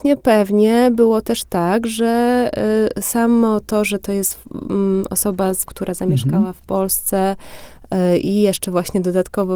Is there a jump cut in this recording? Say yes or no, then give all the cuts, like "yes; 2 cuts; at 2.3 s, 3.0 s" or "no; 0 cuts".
yes; 1 cut; at 5.7 s